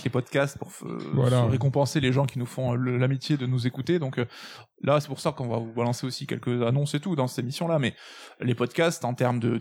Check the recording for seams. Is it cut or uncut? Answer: uncut